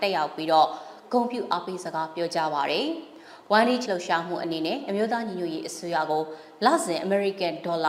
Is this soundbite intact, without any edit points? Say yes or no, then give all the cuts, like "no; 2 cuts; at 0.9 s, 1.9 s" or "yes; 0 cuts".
no; 1 cut; at 3.9 s